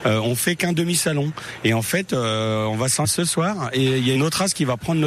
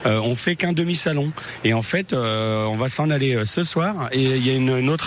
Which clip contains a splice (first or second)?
first